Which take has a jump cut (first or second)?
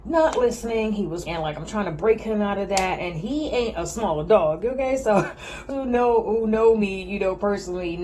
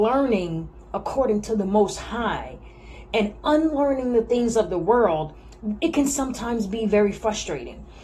first